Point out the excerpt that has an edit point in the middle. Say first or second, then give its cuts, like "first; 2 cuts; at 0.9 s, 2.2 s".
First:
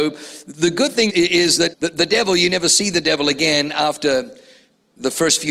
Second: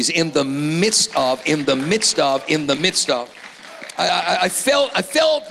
first; 2 cuts; at 1.1 s, 1.7 s